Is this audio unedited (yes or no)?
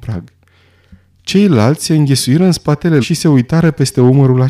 no